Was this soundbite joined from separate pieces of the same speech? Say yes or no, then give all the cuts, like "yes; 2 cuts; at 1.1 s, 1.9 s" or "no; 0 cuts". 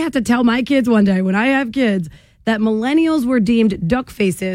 no; 0 cuts